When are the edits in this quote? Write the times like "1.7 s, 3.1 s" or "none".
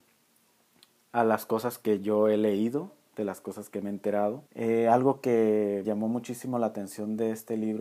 4.5 s, 5.8 s